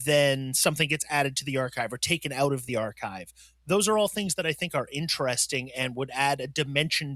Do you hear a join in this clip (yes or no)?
no